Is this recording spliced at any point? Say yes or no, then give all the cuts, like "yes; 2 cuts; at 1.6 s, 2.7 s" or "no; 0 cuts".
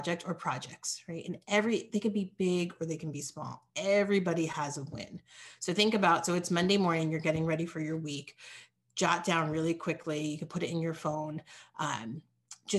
no; 0 cuts